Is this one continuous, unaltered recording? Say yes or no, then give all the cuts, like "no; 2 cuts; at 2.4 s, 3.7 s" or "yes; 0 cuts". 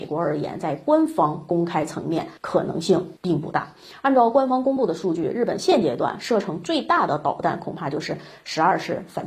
no; 2 cuts; at 2.4 s, 3.2 s